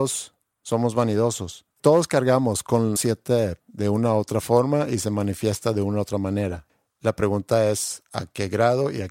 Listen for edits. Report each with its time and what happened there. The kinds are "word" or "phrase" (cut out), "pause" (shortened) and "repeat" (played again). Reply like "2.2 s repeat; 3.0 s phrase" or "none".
3.0 s word; 3.6 s word

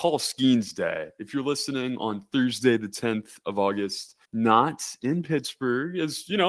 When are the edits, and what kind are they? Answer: 4.2 s pause

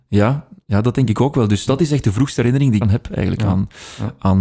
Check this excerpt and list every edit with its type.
1.7 s word; 2.8 s word

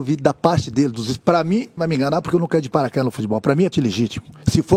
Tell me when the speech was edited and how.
1.8 s word; 3.7 s word

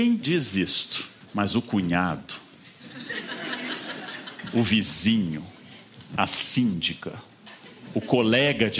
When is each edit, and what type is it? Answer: 1.2 s pause

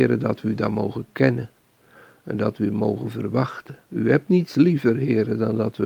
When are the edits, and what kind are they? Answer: 3.8 s pause

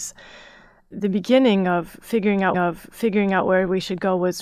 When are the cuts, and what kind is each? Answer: 2.5 s repeat

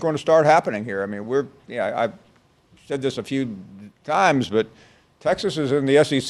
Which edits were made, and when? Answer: none

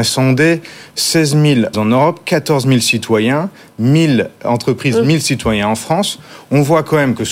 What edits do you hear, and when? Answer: 1.7 s word

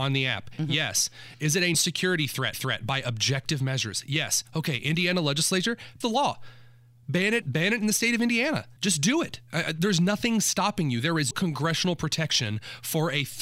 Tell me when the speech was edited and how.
1.7 s word; 2.5 s repeat; 6.0 s word; 7.4 s word; 8.8 s pause; 11.3 s word

